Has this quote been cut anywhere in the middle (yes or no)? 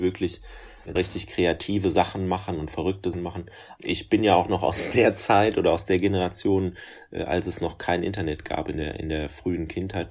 yes